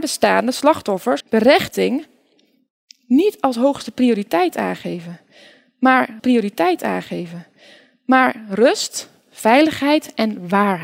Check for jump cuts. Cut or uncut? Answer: cut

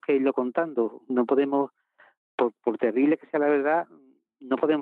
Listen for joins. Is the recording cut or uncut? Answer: uncut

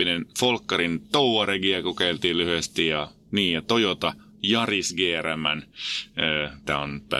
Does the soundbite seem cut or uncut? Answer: uncut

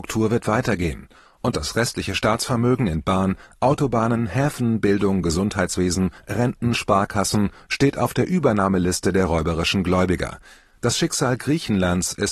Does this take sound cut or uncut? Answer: uncut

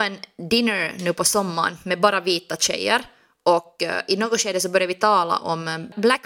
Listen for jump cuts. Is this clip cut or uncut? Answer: uncut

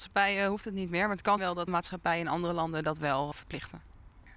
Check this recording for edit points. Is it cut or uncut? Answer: cut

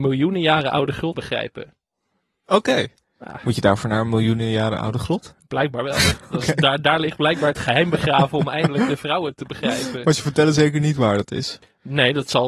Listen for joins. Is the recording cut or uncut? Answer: cut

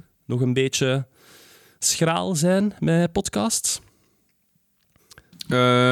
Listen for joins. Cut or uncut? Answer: uncut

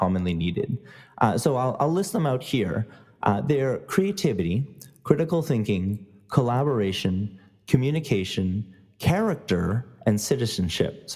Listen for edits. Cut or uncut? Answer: uncut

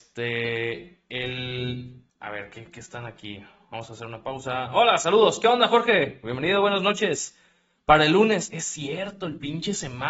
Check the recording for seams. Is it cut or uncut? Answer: cut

